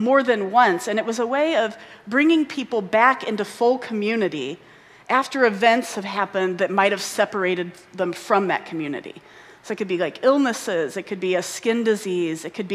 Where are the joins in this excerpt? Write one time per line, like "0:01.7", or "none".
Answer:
none

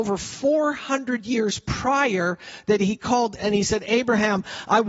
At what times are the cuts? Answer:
0:03.4

